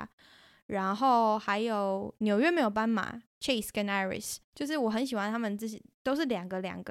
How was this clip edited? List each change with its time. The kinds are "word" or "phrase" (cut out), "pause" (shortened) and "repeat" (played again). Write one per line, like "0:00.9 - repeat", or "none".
0:04.5 - pause